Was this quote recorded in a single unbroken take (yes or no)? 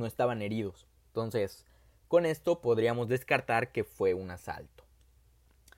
yes